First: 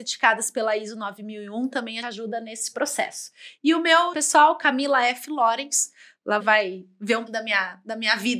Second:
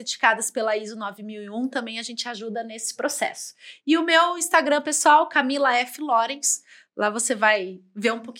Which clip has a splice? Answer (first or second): first